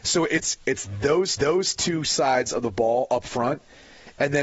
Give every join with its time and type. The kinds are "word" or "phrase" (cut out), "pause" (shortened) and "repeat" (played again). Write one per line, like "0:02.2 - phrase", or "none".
0:01.4 - repeat

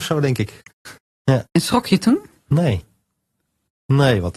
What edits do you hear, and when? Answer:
none

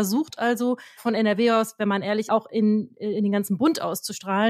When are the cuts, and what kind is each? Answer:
0:01.0 - word
0:02.3 - phrase

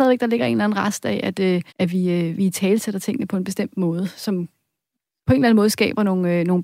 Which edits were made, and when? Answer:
0:01.7 - pause

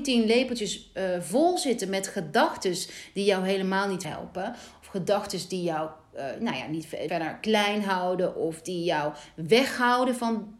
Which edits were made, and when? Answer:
0:04.0 - word
0:07.1 - word

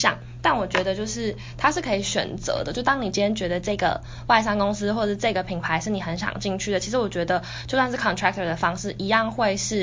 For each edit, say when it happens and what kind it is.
none

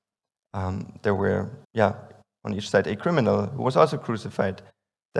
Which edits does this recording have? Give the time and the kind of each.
0:01.6 - pause

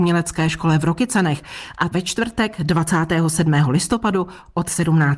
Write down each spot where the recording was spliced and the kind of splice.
0:01.9 - word

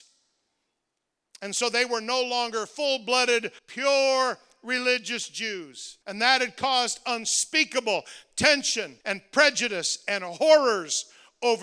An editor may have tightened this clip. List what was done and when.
0:03.6 - pause
0:06.0 - pause
0:09.0 - pause

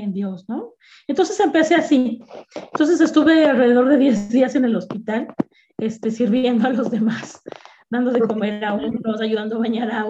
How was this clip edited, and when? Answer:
none

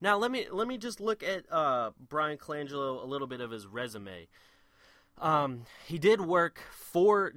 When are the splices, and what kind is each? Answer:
none

